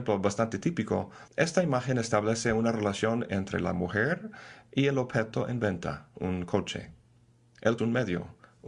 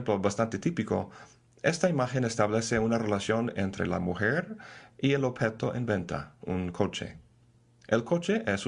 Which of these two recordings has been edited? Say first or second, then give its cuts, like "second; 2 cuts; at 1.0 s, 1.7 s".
first; 2 cuts; at 1.3 s, 7.8 s